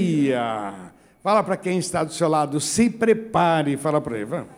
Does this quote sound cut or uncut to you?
uncut